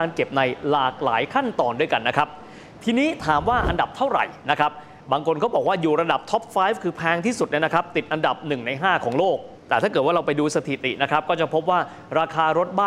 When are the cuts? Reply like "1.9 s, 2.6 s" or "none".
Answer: 9.6 s